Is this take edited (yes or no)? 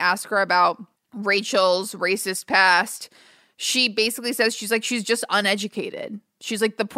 no